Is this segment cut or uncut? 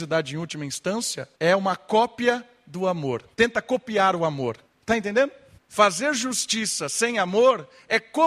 cut